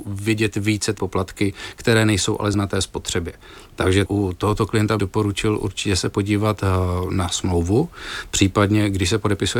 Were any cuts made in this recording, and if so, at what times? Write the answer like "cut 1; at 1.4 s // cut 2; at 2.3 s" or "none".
cut 1; at 1.0 s // cut 2; at 2.5 s // cut 3; at 4.1 s // cut 4; at 5.0 s